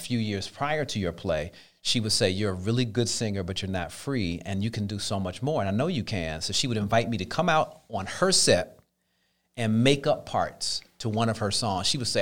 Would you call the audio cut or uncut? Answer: uncut